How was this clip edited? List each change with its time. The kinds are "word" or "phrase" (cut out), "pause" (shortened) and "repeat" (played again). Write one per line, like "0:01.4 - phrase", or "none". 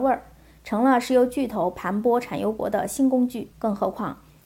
0:03.5 - pause